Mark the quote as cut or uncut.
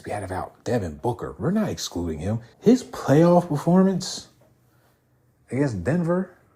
cut